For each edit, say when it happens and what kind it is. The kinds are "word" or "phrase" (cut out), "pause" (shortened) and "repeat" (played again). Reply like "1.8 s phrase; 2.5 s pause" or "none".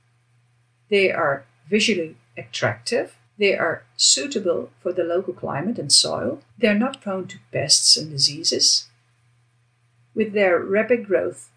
3.3 s pause; 6.5 s pause